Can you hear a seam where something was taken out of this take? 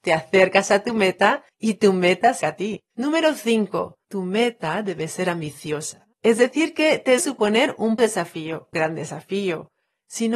yes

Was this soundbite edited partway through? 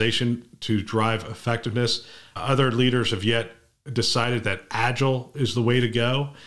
no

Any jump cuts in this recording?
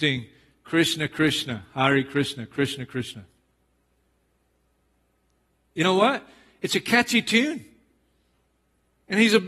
no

